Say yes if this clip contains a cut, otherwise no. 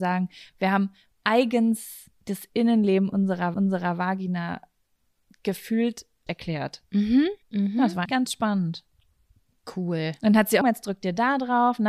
yes